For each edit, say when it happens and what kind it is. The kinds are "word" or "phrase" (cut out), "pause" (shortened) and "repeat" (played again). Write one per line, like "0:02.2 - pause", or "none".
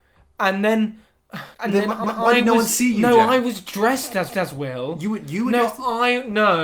0:01.5 - pause
0:02.0 - repeat
0:04.3 - repeat